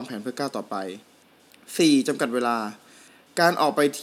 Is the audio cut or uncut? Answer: cut